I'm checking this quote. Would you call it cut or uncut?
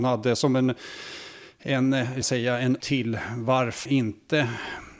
cut